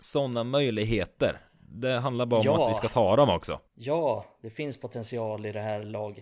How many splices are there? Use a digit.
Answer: 1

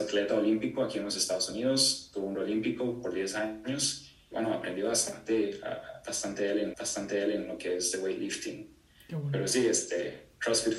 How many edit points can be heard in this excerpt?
3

